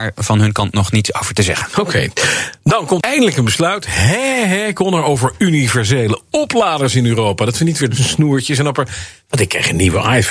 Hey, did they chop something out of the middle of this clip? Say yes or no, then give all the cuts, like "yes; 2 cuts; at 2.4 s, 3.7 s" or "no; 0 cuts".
yes; 2 cuts; at 3.0 s, 8.0 s